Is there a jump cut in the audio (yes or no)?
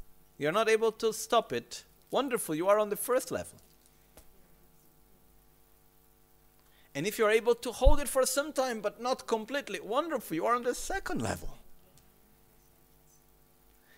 no